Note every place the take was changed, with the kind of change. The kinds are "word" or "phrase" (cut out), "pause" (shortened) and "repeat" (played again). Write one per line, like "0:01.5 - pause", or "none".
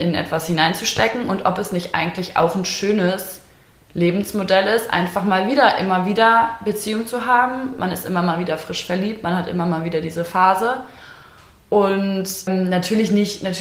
none